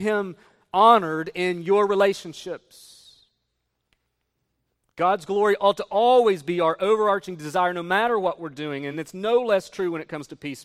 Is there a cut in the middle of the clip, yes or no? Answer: no